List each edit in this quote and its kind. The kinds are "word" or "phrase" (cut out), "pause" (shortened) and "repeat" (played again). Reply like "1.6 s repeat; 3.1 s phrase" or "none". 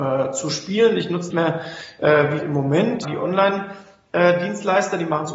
1.3 s phrase; 2.4 s word; 3.0 s word